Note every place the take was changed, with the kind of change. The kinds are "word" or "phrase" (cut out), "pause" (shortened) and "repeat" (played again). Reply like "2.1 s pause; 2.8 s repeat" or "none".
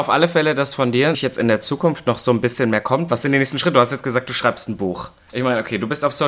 1.1 s word